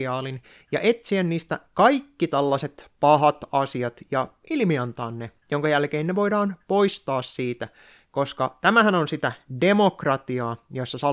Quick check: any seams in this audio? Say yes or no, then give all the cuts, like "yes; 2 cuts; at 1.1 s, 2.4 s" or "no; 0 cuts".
no; 0 cuts